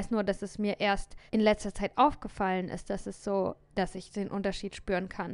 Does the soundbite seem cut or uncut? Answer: cut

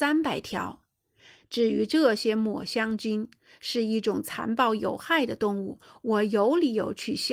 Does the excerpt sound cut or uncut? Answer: uncut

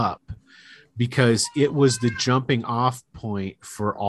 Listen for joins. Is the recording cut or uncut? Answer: uncut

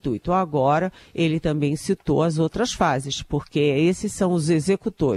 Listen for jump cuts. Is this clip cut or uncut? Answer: uncut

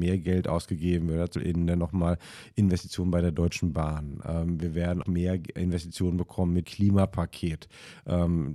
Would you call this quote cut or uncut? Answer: cut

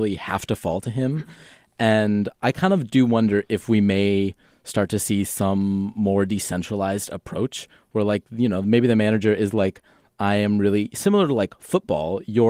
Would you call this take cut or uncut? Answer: uncut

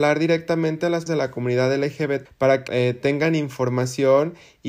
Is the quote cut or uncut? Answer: cut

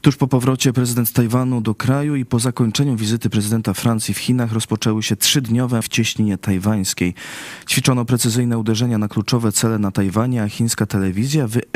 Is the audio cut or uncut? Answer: cut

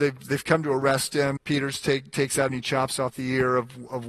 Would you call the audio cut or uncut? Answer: cut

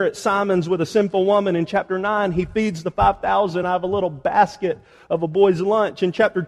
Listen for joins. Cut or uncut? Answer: uncut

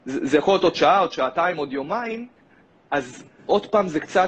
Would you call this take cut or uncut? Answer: uncut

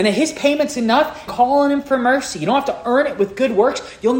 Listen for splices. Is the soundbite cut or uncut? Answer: cut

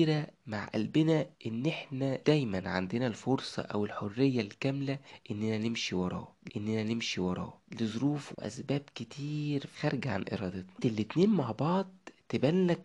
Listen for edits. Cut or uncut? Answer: cut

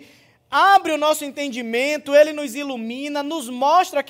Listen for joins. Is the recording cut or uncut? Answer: uncut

